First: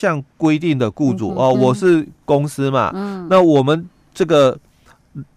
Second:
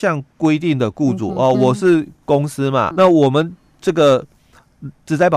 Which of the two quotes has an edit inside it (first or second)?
second